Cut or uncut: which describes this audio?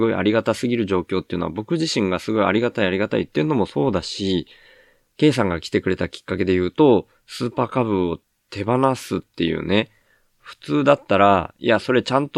uncut